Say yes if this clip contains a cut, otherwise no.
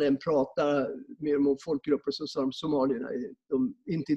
no